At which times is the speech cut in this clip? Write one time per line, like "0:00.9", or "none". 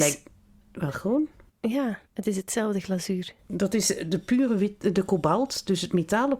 0:02.0